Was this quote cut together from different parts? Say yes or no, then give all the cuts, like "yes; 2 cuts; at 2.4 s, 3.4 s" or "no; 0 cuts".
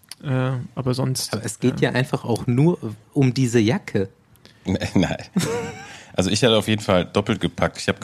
no; 0 cuts